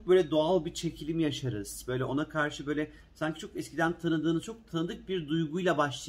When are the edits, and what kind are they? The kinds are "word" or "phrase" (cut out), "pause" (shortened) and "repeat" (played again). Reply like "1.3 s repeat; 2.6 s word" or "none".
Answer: none